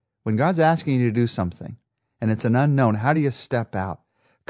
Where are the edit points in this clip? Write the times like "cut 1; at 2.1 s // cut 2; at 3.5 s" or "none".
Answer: none